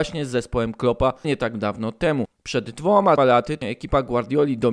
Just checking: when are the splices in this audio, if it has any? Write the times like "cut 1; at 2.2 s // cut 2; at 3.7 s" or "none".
cut 1; at 1.2 s // cut 2; at 3.2 s // cut 3; at 3.6 s